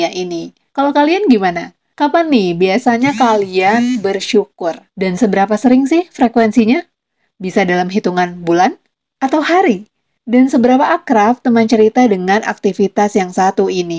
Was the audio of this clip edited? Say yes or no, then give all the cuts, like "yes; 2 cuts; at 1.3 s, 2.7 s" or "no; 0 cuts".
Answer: yes; 2 cuts; at 4.9 s, 9.0 s